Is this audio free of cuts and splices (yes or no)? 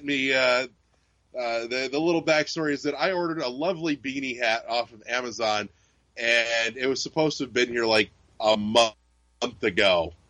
yes